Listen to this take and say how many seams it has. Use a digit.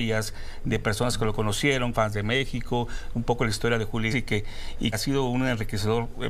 3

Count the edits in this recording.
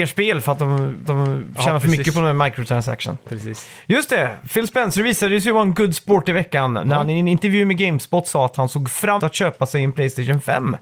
2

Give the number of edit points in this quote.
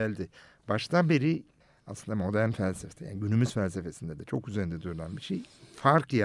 1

